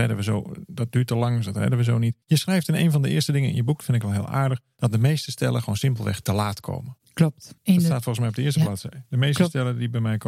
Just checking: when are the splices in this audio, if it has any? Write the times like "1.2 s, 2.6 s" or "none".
2.2 s, 7.6 s